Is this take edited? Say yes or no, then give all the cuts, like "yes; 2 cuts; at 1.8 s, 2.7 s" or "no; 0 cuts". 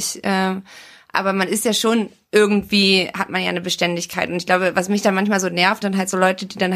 yes; 1 cut; at 5.8 s